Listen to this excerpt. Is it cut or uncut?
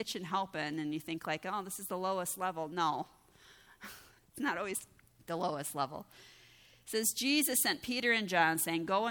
uncut